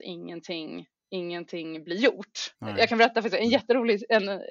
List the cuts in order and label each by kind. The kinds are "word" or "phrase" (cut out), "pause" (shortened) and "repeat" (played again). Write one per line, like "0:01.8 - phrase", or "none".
0:02.6 - pause